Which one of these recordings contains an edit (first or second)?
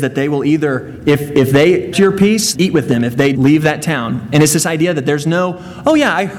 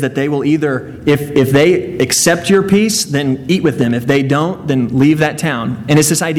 first